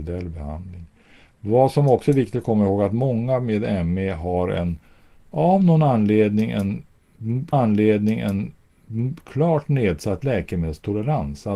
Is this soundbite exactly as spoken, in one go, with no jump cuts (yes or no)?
no